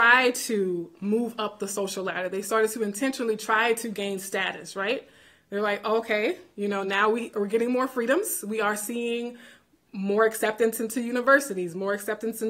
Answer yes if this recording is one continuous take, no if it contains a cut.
yes